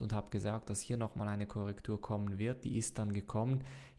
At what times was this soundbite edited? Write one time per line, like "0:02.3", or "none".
none